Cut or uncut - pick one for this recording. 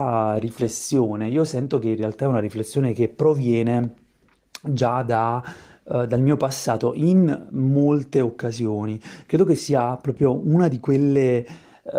uncut